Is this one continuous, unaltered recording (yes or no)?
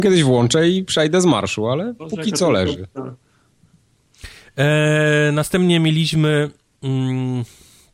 yes